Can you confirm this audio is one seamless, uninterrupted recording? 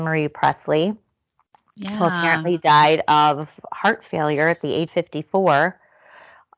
no; 1 cut; at 4.9 s

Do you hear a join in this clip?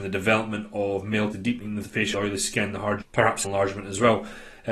yes; 5 cuts; at 1.3 s, 1.8 s, 2.1 s, 3.0 s, 3.4 s

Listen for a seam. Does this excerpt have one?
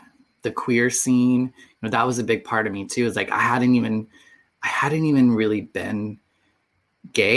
no; 0 cuts

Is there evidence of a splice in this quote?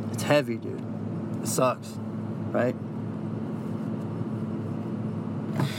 no; 0 cuts

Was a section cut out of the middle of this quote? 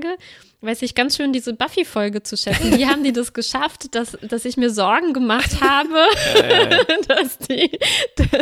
no; 0 cuts

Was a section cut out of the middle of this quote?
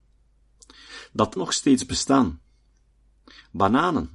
yes; 1 cut; at 1.4 s

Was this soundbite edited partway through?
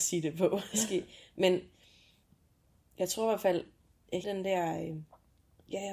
yes; 1 cut; at 4.2 s

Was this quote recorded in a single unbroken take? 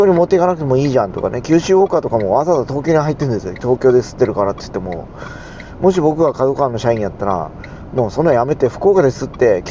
yes; 0 cuts

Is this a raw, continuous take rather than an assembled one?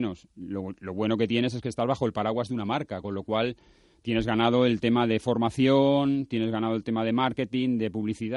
yes; 0 cuts

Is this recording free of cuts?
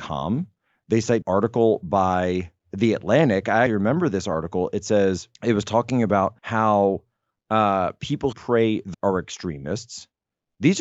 no; 7 cuts; at 1.2 s, 2.6 s, 3.7 s, 5.3 s, 6.4 s, 8.3 s, 8.9 s

